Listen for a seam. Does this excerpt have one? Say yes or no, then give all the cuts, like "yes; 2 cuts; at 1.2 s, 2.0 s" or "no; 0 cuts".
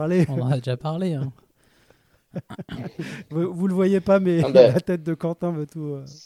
no; 0 cuts